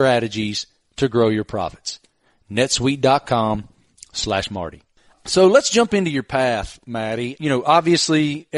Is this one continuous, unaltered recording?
yes; 0 cuts

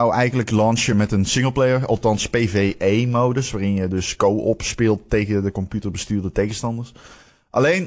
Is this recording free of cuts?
yes; 0 cuts

